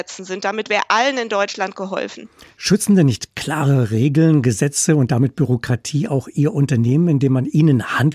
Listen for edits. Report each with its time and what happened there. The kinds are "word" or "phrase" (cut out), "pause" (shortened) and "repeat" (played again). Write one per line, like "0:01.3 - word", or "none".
none